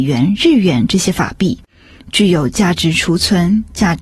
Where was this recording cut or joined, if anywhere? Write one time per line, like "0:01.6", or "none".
none

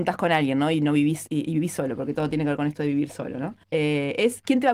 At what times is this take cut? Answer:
0:03.6

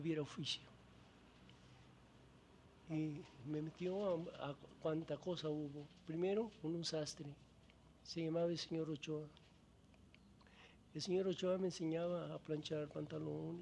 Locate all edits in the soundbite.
0:08.0

